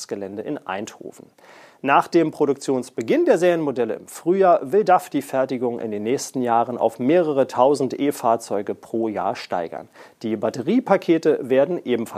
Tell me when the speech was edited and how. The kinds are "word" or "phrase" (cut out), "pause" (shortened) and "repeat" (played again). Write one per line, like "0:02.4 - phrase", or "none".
none